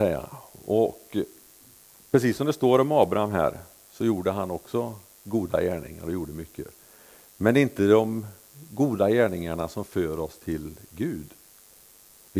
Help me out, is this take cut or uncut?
uncut